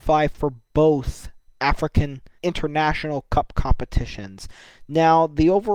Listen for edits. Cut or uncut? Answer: uncut